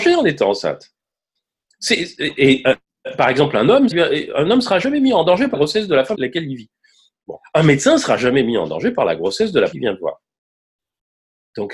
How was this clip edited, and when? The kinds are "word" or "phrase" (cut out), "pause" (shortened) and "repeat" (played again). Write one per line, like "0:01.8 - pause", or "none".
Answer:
0:03.9 - word
0:05.5 - word
0:06.1 - word
0:09.7 - word